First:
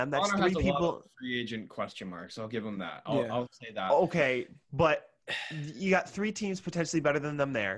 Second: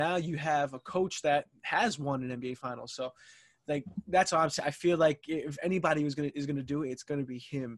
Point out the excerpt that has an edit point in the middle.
first; 1 cut; at 4.6 s

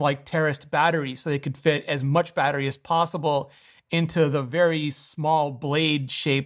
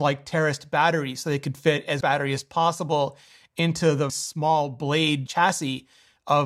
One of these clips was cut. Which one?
second; 3 cuts; at 2.0 s, 4.1 s, 5.3 s

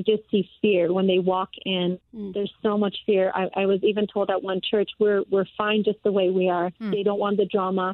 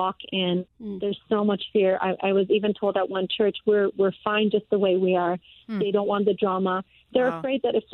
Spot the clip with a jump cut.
first; 1 cut; at 6.8 s

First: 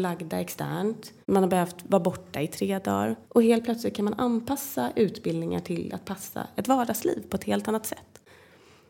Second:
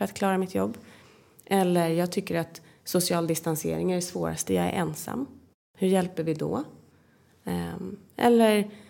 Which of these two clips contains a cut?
first; 2 cuts; at 1.2 s, 3.2 s

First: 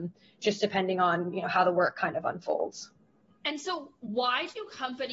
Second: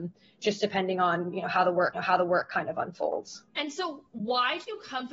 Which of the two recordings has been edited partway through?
second; 2 cuts; at 1.9 s, 3.5 s

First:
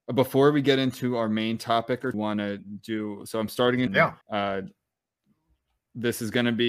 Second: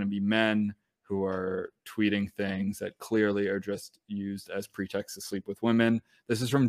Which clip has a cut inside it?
first; 3 cuts; at 2.1 s, 3.9 s, 4.2 s

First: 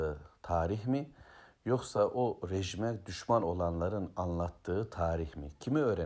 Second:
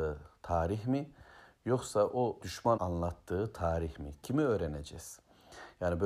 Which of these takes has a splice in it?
second; 2 cuts; at 2.4 s, 2.8 s

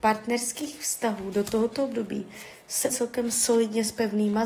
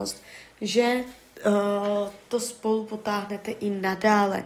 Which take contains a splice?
first; 1 cut; at 2.9 s

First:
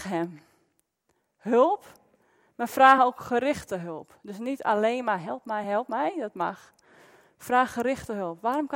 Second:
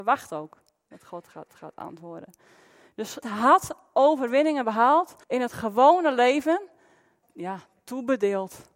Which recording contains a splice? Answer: second; 4 cuts; at 1.5 s, 3.2 s, 5.2 s, 7.2 s

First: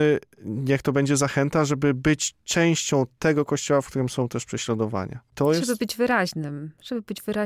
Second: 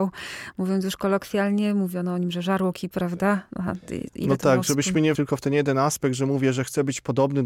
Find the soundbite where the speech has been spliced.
second; 2 cuts; at 2.9 s, 5.1 s

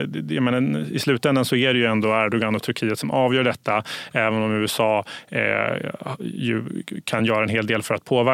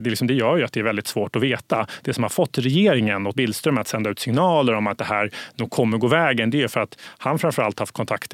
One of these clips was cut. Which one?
second; 1 cut; at 3.3 s

